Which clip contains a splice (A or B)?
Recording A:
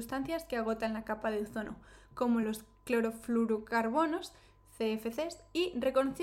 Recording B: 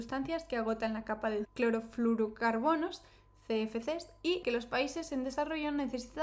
B